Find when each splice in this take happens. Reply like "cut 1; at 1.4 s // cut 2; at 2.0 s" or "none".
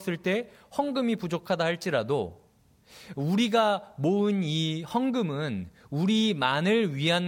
none